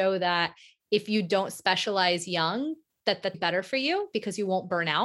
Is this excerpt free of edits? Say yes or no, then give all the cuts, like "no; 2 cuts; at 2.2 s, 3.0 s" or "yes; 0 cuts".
no; 1 cut; at 3.3 s